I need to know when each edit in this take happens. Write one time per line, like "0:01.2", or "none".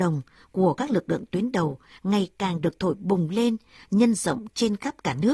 none

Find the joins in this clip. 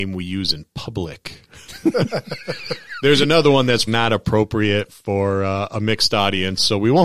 0:03.9

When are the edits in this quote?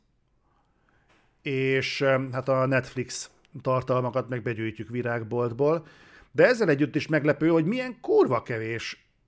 none

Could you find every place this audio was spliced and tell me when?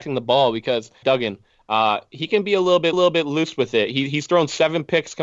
0:01.0
0:02.9

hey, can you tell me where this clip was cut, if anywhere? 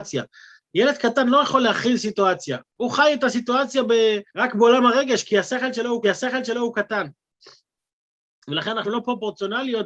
0:02.7
0:04.3
0:06.0
0:08.8

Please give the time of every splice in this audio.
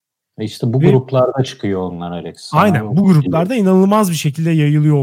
none

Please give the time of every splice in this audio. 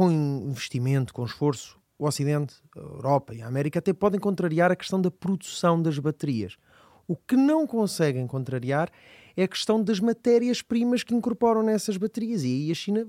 none

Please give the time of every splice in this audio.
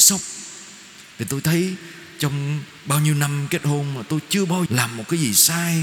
0:04.7

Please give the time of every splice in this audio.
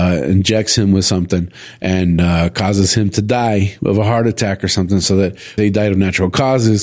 0:05.6

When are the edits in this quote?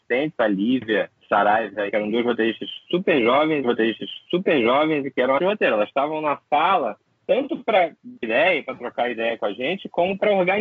0:01.2
0:01.9
0:03.6
0:05.4
0:07.1
0:08.2

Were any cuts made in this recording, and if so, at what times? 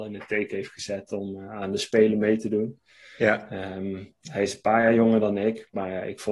none

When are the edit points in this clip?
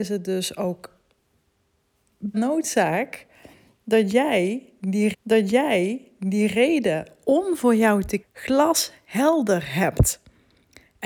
0:02.3
0:05.1
0:08.2

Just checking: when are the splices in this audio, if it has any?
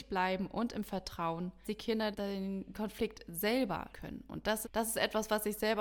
0:01.6
0:02.1
0:02.7
0:03.9
0:04.6

